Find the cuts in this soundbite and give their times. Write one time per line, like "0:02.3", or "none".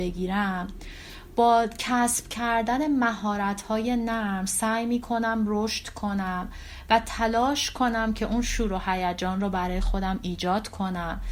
none